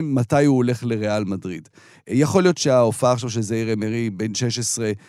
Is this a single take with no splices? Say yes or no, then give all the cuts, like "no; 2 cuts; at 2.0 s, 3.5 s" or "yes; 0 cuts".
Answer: yes; 0 cuts